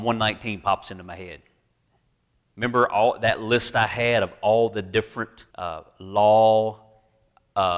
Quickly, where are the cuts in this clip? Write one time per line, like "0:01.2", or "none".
0:05.5